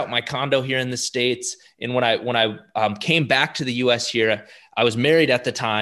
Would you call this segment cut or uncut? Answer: uncut